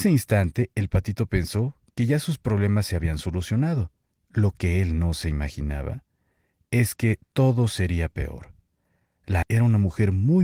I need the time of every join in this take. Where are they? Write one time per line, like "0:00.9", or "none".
0:04.0
0:09.4